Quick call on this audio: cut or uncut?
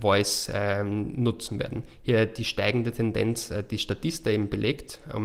uncut